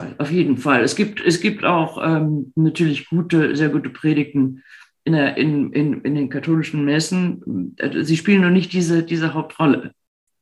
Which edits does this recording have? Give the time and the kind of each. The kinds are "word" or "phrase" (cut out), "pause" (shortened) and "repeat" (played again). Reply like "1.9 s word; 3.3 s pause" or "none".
none

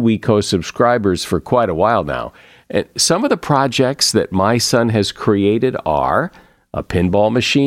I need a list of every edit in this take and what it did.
none

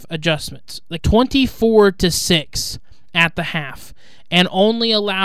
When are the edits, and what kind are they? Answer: 1.0 s phrase

